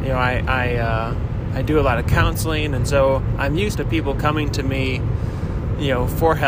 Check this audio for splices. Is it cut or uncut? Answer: cut